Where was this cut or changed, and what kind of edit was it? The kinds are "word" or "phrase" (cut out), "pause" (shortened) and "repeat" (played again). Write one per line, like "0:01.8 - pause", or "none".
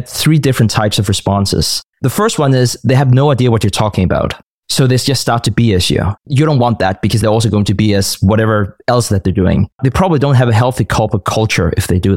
0:01.9 - pause
0:04.4 - pause
0:06.2 - pause
0:07.2 - phrase
0:09.7 - pause